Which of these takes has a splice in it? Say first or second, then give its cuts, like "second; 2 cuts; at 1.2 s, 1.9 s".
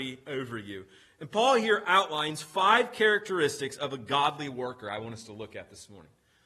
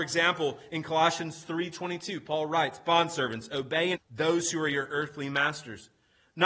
second; 1 cut; at 4.0 s